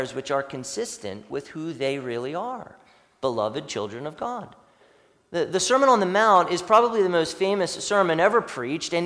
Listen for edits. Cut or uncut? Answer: uncut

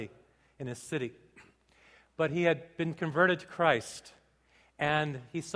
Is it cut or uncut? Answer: uncut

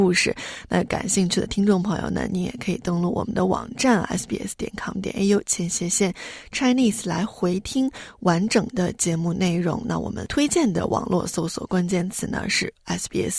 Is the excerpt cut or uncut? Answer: uncut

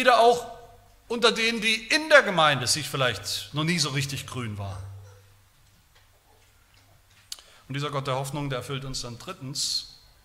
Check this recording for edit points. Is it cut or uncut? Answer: uncut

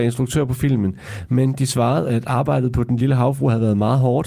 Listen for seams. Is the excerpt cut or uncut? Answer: uncut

